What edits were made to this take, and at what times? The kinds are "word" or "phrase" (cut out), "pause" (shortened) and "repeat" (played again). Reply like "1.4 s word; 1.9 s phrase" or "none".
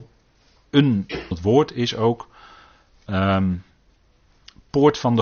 1.3 s phrase